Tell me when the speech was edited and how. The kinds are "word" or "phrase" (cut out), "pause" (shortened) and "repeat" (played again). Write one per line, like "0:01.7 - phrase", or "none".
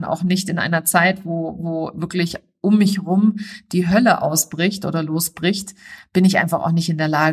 none